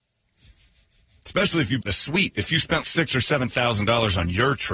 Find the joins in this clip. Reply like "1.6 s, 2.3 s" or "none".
1.8 s, 2.8 s